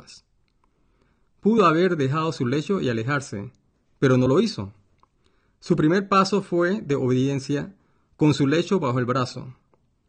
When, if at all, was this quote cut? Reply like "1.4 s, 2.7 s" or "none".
none

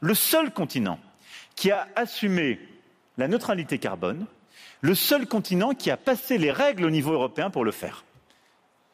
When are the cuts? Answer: none

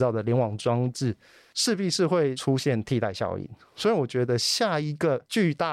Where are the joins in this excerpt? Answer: none

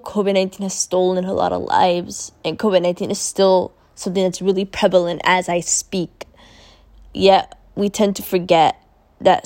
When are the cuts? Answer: none

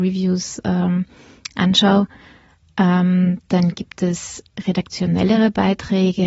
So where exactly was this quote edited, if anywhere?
none

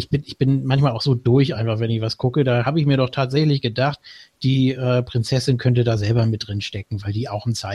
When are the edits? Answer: none

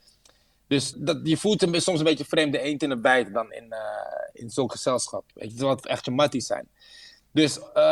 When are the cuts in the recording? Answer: 0.9 s, 3.5 s, 5.8 s

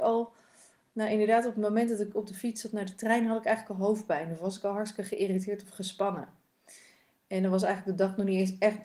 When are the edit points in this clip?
none

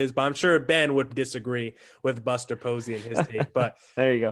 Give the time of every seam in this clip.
1.1 s

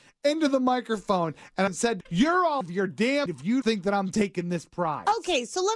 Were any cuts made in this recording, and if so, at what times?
1.7 s, 2.0 s, 2.6 s, 3.3 s, 3.6 s

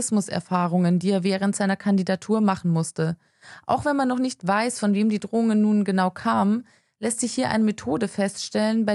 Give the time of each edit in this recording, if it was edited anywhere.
none

